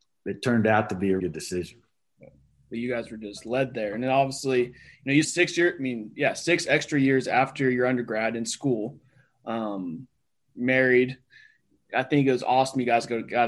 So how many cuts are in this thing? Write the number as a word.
two